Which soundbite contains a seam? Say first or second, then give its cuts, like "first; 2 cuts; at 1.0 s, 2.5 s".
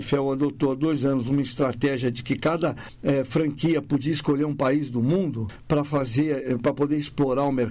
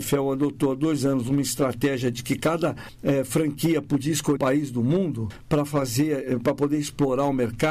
second; 1 cut; at 4.4 s